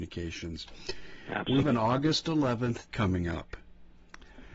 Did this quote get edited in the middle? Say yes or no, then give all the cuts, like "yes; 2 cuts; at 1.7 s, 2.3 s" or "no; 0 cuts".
yes; 2 cuts; at 1.6 s, 2.9 s